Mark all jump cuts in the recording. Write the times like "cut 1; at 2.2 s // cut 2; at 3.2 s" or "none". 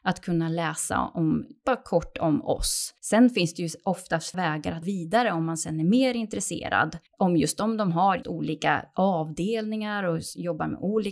cut 1; at 3.0 s // cut 2; at 4.3 s // cut 3; at 4.8 s // cut 4; at 7.1 s // cut 5; at 8.2 s

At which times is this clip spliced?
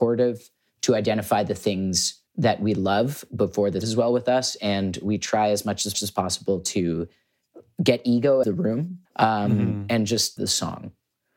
cut 1; at 2.3 s // cut 2; at 3.8 s // cut 3; at 5.9 s // cut 4; at 8.4 s // cut 5; at 9.1 s // cut 6; at 10.4 s

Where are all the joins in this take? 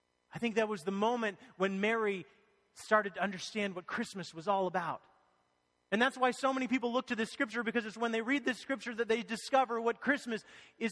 none

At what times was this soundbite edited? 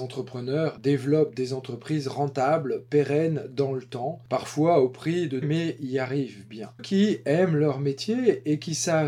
cut 1; at 5.4 s // cut 2; at 6.8 s

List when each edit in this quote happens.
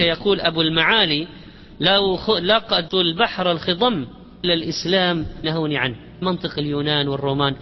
cut 1; at 2.9 s // cut 2; at 4.4 s // cut 3; at 5.4 s // cut 4; at 6.2 s

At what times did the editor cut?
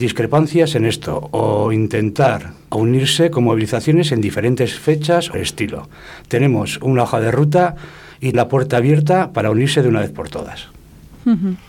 cut 1; at 2.7 s // cut 2; at 5.3 s // cut 3; at 8.3 s

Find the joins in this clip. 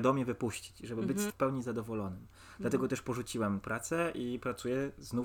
cut 1; at 1.3 s // cut 2; at 3.6 s

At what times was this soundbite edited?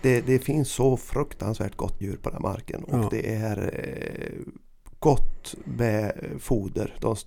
cut 1; at 2.0 s

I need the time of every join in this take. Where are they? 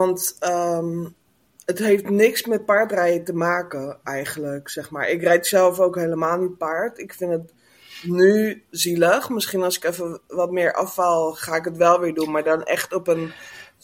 none

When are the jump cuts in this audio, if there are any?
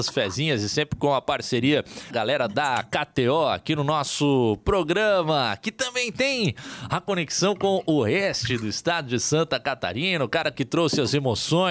cut 1; at 2.1 s

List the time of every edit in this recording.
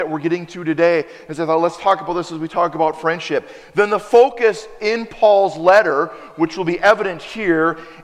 none

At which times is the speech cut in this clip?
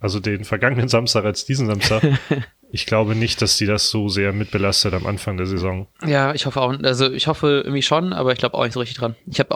cut 1; at 5.9 s

